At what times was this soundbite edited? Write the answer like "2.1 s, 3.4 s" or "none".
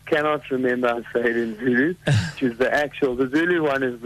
0.9 s, 2.4 s